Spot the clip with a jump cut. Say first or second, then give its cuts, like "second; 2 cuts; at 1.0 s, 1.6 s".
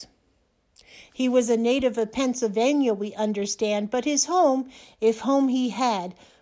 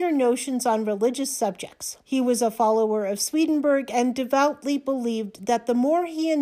second; 1 cut; at 2.0 s